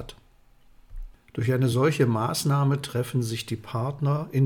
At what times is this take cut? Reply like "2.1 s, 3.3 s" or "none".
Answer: none